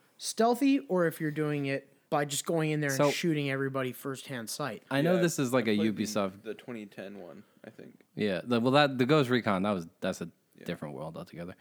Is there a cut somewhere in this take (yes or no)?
yes